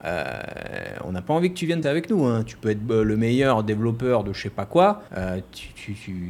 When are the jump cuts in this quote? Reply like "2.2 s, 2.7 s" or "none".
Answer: 1.8 s, 5.1 s